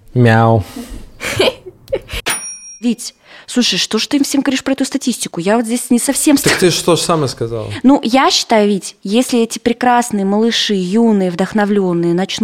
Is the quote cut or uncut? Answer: cut